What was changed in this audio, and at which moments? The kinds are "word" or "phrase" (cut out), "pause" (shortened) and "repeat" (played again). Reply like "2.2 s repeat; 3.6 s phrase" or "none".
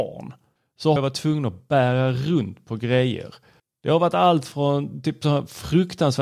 1.0 s word